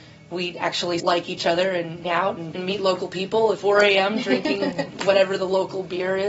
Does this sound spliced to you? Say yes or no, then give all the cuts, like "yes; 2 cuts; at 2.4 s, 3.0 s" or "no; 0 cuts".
yes; 4 cuts; at 1.0 s, 2.0 s, 2.5 s, 3.5 s